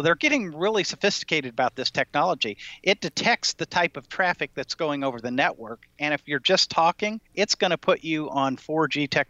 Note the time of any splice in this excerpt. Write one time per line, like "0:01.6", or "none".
0:07.3